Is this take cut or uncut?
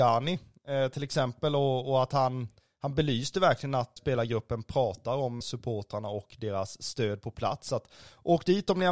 cut